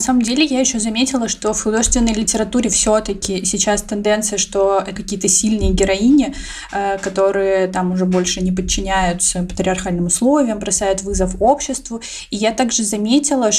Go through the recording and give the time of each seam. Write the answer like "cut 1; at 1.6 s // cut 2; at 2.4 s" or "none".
cut 1; at 5.0 s